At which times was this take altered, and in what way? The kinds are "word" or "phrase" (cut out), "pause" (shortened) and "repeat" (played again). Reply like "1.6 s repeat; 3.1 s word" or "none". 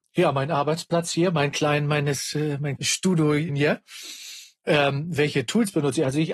2.8 s word; 3.5 s word